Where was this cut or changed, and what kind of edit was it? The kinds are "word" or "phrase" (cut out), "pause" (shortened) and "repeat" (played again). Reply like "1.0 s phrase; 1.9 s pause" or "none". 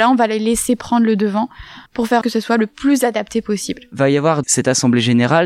1.9 s pause; 2.2 s phrase; 4.4 s word